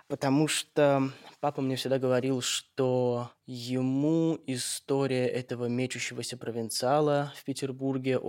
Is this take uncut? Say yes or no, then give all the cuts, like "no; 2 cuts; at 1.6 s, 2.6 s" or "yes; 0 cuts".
yes; 0 cuts